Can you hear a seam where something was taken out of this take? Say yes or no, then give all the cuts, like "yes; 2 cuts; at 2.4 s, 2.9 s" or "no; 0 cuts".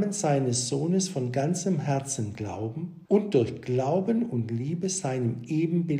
yes; 1 cut; at 3.1 s